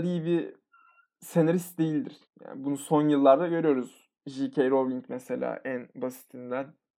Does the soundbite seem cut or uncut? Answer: cut